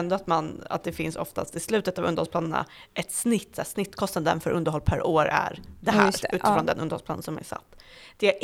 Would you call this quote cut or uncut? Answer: uncut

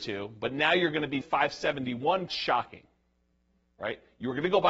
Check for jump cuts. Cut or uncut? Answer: cut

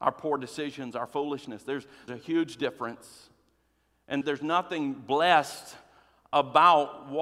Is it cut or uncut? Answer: cut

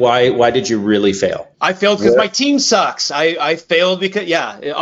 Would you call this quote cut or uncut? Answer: cut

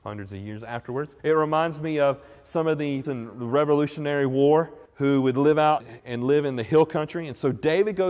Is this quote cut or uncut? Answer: cut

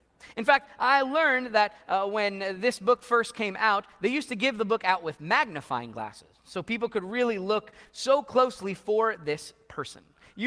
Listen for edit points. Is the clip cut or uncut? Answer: uncut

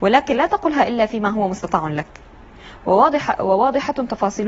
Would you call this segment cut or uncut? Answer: uncut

